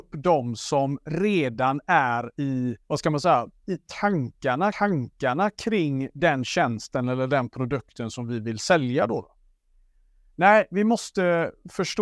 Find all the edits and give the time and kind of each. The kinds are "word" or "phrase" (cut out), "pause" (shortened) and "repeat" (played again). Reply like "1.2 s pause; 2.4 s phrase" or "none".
2.8 s pause; 4.7 s repeat